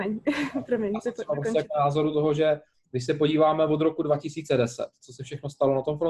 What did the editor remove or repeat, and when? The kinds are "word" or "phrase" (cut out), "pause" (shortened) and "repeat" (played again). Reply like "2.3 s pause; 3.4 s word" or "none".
none